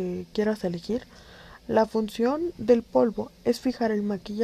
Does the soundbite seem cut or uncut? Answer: uncut